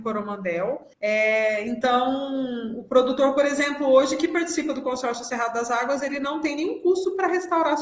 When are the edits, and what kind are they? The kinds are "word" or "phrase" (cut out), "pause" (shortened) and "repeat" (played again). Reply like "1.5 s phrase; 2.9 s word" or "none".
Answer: 0.9 s pause